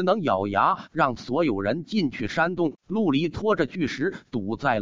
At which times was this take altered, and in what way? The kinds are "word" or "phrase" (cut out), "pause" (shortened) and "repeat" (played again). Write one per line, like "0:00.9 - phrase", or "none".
0:02.8 - pause